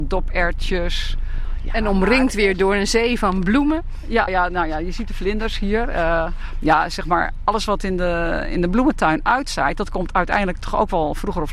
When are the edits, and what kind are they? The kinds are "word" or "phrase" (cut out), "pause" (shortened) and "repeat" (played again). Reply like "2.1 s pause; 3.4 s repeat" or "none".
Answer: 4.3 s word